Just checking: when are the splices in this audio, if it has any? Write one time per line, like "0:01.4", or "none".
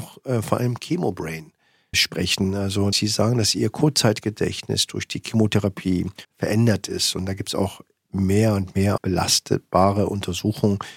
0:01.9
0:02.9
0:06.2
0:09.0